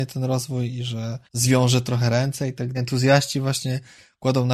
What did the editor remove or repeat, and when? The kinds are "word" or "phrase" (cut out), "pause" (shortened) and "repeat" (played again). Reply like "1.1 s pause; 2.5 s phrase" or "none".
1.3 s pause; 2.7 s phrase